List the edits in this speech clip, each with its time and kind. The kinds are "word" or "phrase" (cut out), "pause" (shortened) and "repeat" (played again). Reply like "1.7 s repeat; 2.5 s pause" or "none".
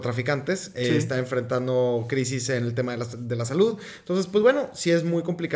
none

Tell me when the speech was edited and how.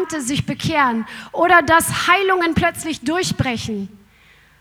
none

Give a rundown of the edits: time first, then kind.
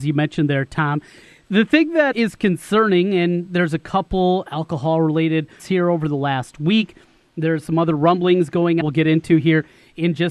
2.1 s word; 5.6 s word; 8.8 s word

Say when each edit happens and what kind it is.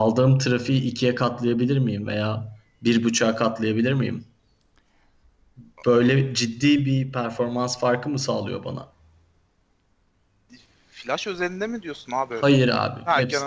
none

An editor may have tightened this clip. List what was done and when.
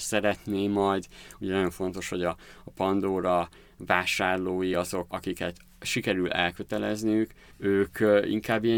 none

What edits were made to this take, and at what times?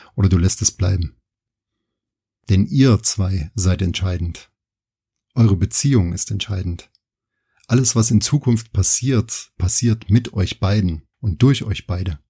11.1 s pause

